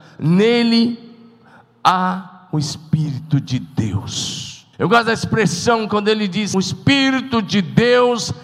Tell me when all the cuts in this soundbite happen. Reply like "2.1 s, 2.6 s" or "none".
4.7 s, 6.5 s